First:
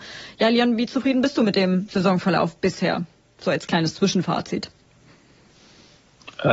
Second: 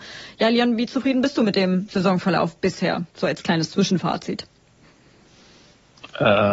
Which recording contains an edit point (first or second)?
second